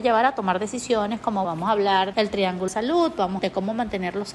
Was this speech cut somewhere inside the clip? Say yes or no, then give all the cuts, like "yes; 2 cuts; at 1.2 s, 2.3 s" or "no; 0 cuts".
yes; 4 cuts; at 1.4 s, 2.1 s, 2.7 s, 3.4 s